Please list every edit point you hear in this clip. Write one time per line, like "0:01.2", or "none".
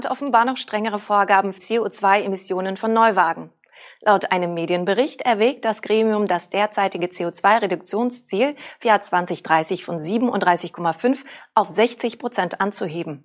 0:01.6
0:08.8